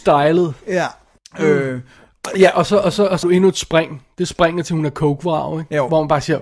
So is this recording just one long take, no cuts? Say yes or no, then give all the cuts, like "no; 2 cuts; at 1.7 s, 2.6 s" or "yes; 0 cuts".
no; 2 cuts; at 1.2 s, 3.2 s